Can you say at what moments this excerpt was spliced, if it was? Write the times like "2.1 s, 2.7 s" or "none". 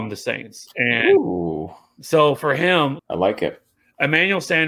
2.4 s, 3.0 s